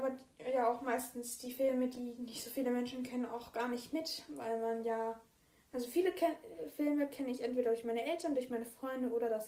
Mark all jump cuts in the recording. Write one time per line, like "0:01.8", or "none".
none